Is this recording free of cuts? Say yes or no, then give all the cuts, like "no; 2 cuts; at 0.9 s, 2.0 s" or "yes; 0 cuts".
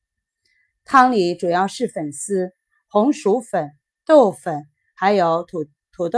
yes; 0 cuts